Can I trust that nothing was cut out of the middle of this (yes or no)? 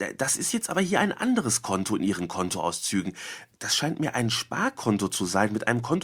yes